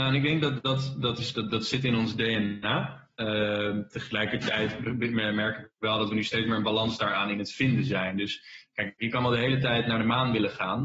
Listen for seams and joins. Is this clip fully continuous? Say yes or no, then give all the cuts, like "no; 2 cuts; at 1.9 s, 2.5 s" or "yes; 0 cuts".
yes; 0 cuts